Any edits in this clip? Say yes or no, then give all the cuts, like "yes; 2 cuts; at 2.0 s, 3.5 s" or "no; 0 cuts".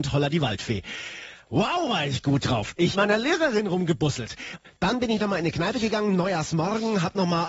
yes; 1 cut; at 2.9 s